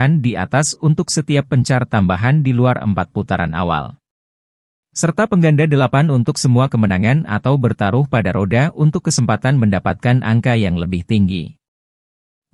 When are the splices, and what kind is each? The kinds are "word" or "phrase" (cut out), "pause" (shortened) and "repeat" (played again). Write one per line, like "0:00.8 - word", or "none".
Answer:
none

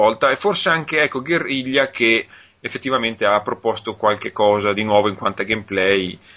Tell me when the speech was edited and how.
none

